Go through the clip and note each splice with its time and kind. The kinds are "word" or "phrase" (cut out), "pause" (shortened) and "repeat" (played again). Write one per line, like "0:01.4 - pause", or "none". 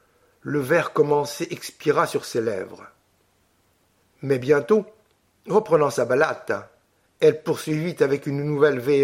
none

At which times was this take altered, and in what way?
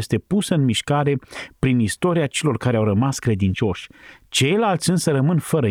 none

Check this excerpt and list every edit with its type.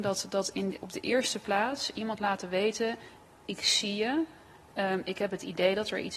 none

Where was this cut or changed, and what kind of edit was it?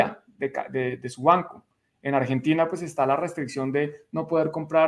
none

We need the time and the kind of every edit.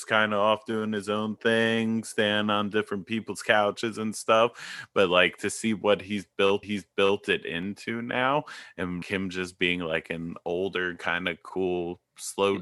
0:06.6 - repeat
0:09.0 - word

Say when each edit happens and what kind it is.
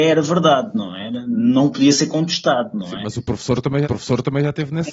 0:03.8 - repeat

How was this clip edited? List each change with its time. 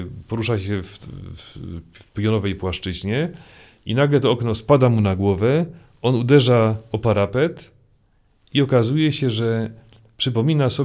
none

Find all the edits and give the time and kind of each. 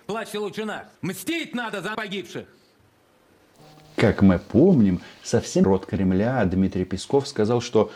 0:00.9 - pause
0:01.9 - word
0:05.6 - phrase

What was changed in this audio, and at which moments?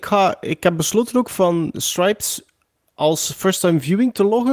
none

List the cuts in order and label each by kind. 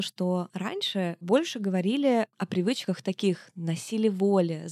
none

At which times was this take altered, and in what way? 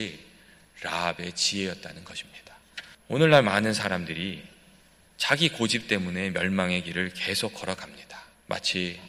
none

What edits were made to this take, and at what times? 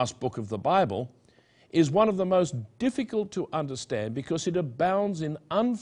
none

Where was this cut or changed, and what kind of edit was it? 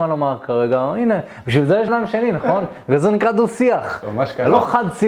0:01.9 - word

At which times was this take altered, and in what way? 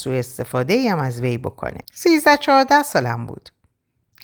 0:01.8 - pause

